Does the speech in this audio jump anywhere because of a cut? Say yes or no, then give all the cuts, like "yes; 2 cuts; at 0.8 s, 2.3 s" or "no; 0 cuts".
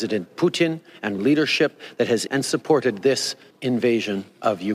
yes; 3 cuts; at 1.2 s, 2.3 s, 3.5 s